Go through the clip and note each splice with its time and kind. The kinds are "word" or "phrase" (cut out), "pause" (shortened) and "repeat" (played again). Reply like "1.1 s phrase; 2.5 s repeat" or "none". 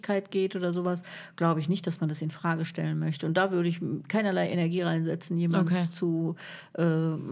none